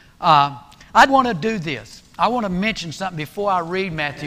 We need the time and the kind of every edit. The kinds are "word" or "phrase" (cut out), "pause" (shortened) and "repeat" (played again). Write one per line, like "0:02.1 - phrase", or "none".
0:01.1 - word